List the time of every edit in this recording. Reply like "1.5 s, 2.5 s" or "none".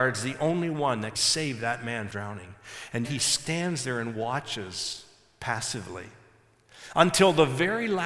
1.1 s, 2.1 s, 3.0 s